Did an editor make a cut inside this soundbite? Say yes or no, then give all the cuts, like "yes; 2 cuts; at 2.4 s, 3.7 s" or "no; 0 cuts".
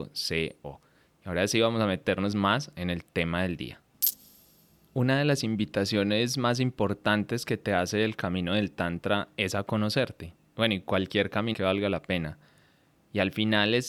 yes; 2 cuts; at 2.3 s, 11.5 s